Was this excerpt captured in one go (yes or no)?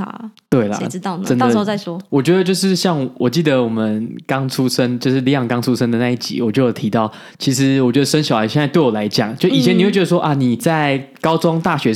yes